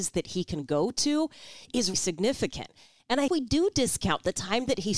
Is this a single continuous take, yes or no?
no